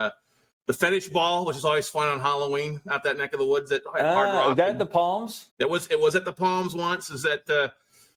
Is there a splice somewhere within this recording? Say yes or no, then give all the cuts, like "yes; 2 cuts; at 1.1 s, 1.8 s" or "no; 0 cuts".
yes; 1 cut; at 5.5 s